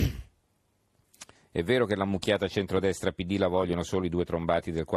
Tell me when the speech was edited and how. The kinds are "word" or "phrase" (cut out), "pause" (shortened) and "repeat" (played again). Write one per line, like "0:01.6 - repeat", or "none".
0:01.3 - pause